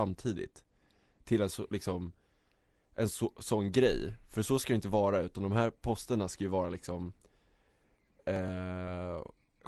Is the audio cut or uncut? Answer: uncut